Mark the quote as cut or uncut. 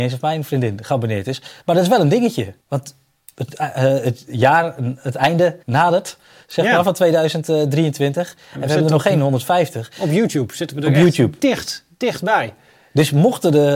cut